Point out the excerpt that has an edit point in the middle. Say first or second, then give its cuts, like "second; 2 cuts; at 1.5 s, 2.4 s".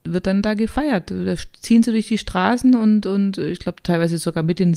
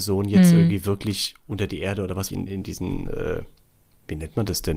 second; 1 cut; at 2.3 s